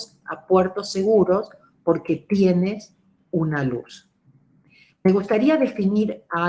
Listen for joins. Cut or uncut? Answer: uncut